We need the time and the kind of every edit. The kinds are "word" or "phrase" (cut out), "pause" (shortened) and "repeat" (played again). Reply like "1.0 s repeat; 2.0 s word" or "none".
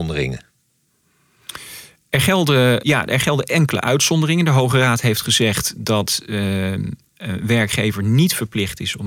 2.8 s word

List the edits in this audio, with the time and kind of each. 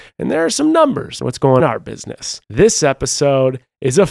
1.2 s word; 1.6 s phrase; 2.4 s pause

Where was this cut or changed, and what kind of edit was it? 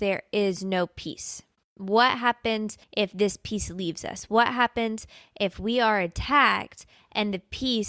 2.8 s pause

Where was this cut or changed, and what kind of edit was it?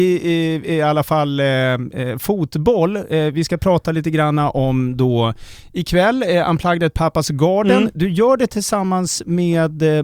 none

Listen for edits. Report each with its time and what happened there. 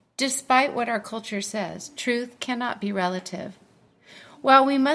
none

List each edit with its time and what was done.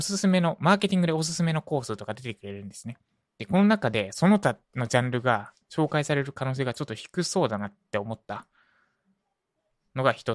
4.6 s pause

